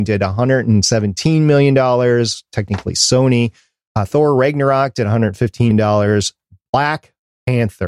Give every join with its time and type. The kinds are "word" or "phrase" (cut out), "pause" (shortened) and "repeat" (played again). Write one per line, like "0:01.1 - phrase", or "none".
0:05.7 - word

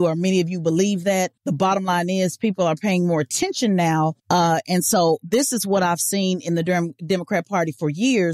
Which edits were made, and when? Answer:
0:01.4 - pause
0:04.2 - pause

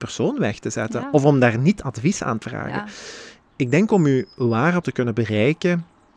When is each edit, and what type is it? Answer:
0:02.4 - word
0:04.8 - word

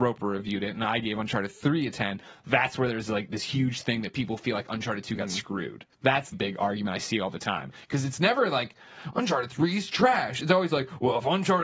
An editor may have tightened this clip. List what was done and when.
0:05.9 - pause
0:06.3 - word

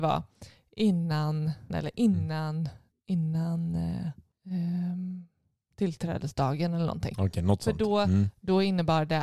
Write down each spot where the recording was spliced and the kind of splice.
0:01.7 - word

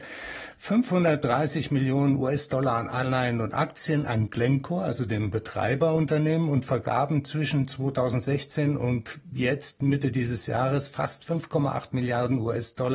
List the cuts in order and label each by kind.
none

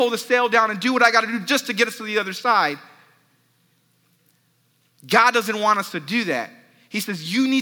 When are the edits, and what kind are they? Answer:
none

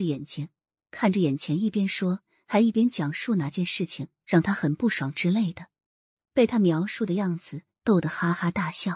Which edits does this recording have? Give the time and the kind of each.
none

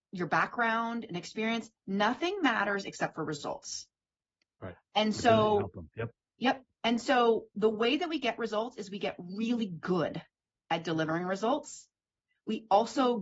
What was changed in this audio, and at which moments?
none

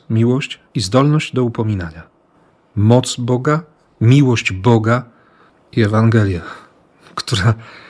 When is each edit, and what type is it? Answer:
none

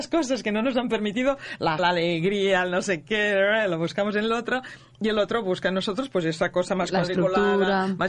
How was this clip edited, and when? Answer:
0:01.8 - word

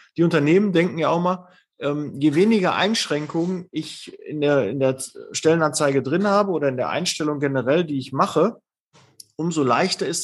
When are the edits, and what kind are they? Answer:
none

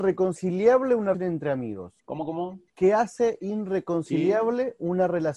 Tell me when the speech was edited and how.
0:01.1 - word
0:02.0 - pause
0:02.7 - pause

